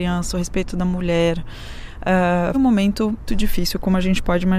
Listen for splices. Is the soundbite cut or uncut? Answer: cut